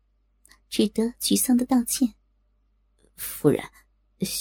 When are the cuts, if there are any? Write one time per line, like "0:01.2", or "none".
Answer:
none

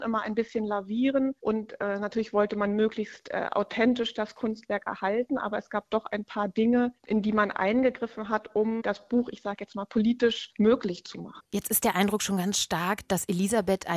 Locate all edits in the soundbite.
0:11.5

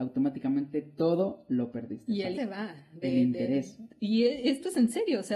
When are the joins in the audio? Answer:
0:02.3

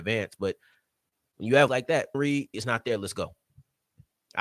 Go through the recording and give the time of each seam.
0:01.7
0:02.1
0:02.5

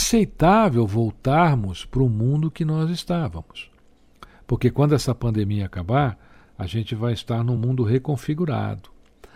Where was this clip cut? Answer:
none

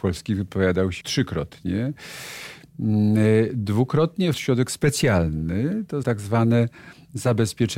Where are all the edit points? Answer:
0:01.0
0:04.3
0:06.0

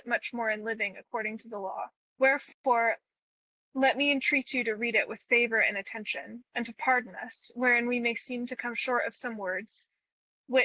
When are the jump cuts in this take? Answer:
0:01.9

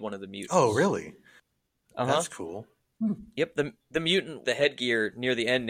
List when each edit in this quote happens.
0:03.8
0:04.4

